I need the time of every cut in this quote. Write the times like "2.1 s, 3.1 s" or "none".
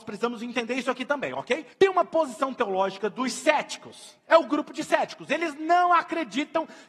1.7 s, 4.2 s